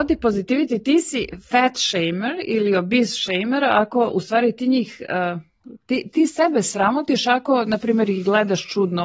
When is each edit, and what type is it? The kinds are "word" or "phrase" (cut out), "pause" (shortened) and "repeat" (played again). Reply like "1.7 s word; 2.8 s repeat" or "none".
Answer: none